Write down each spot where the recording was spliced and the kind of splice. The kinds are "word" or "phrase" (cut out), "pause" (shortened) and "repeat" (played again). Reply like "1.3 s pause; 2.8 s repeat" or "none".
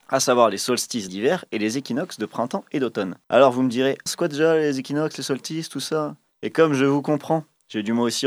1.1 s phrase; 3.2 s pause; 4.1 s word